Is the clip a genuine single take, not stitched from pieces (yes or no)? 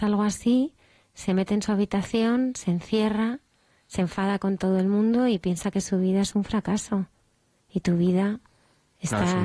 yes